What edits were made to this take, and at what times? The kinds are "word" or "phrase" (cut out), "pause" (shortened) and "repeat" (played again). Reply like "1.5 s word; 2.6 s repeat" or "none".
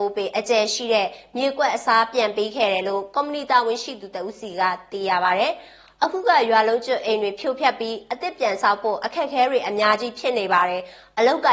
none